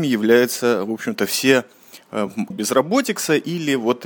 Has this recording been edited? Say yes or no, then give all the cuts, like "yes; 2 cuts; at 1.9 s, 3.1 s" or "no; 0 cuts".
yes; 1 cut; at 2.5 s